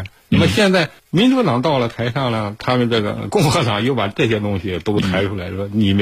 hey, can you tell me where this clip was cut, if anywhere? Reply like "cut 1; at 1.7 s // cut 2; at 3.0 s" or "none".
cut 1; at 1.0 s

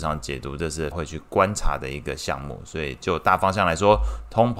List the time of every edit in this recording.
cut 1; at 0.9 s

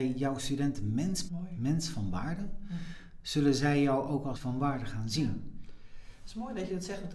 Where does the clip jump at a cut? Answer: cut 1; at 1.3 s // cut 2; at 4.4 s

